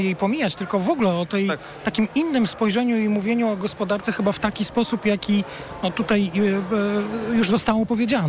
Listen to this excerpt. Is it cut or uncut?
uncut